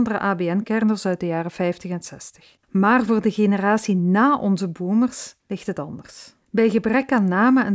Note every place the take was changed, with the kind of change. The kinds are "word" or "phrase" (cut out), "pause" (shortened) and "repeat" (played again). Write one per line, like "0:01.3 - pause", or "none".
0:02.6 - pause
0:05.4 - pause
0:06.4 - pause